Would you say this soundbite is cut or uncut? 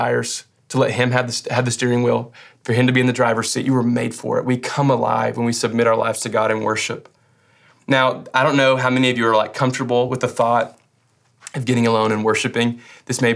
uncut